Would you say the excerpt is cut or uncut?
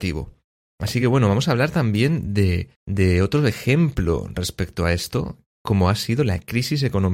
uncut